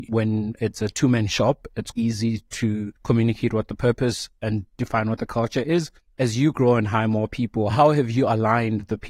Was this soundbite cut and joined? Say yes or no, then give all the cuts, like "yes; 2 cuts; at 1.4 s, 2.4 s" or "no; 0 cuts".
yes; 3 cuts; at 1.9 s, 3.0 s, 6.0 s